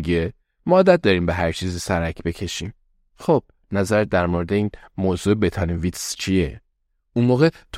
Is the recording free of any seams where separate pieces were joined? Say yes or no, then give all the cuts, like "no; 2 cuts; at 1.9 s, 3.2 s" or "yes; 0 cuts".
yes; 0 cuts